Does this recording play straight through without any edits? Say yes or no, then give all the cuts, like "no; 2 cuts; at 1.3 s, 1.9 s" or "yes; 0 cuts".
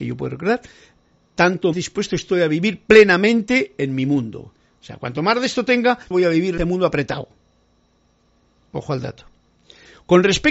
no; 3 cuts; at 1.7 s, 6.1 s, 6.6 s